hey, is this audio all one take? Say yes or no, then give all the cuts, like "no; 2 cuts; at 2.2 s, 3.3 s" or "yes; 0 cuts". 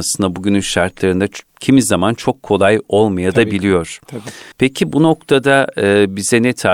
no; 2 cuts; at 1.5 s, 4.5 s